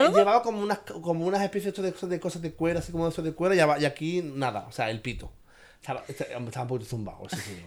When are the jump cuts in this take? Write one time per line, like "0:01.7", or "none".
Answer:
none